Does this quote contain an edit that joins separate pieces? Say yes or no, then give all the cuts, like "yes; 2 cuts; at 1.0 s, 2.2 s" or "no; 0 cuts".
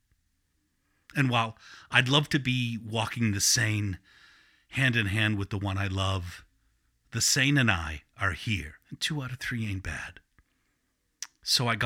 yes; 1 cut; at 8.8 s